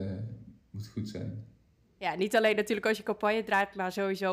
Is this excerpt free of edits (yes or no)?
yes